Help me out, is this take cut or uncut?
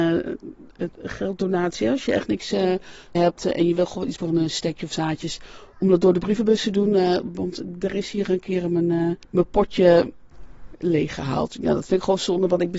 cut